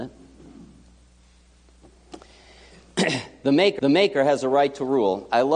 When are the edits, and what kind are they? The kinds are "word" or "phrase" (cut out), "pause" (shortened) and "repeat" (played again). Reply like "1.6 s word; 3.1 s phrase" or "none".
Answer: 3.8 s repeat